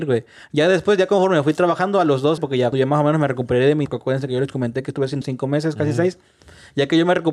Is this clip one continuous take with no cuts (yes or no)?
no